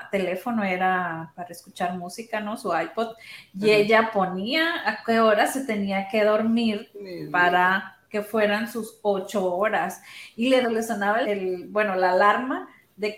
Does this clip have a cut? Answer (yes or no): yes